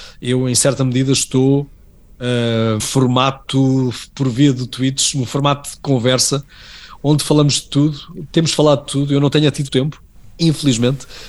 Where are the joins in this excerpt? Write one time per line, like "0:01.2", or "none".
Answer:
0:02.8
0:09.7